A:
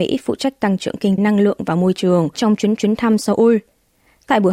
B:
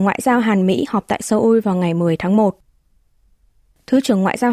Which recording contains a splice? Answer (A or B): A